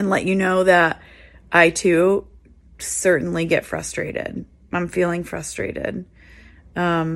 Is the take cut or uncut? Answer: uncut